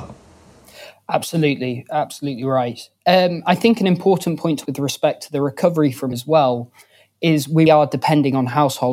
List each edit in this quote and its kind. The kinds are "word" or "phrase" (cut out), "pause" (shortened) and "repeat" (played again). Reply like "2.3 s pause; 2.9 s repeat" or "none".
4.7 s word; 6.1 s word; 7.7 s word